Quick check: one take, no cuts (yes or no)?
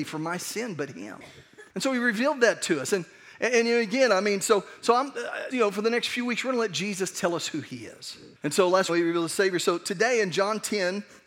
no